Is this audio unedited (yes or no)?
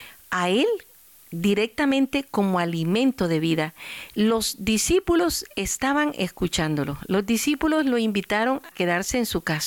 no